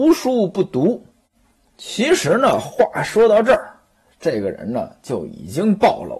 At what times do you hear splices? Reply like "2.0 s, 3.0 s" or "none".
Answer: none